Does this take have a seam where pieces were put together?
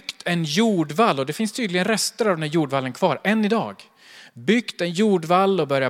no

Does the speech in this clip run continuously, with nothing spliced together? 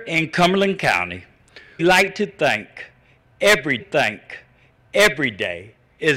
no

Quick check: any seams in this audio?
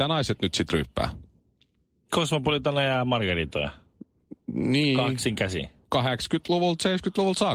no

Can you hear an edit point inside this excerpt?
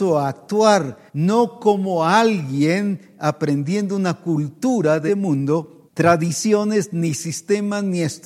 yes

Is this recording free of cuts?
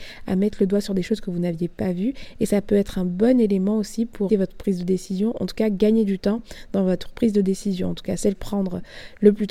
no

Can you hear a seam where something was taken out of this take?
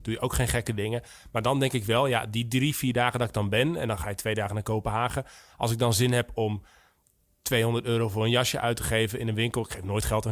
no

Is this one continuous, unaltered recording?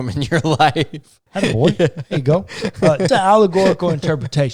no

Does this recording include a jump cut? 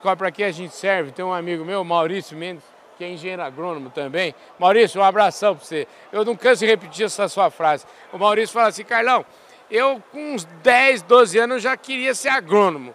no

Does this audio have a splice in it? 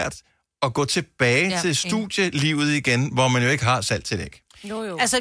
no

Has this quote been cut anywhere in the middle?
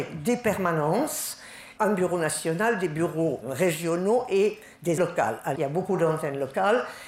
yes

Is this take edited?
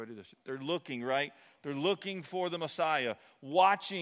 no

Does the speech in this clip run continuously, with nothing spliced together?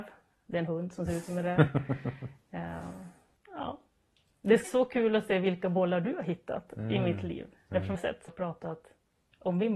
no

